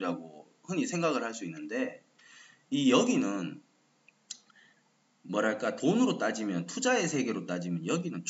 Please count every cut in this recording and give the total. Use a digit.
0